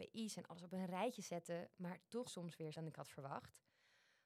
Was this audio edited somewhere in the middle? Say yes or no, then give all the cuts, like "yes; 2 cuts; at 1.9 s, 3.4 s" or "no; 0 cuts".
yes; 2 cuts; at 2.3 s, 2.7 s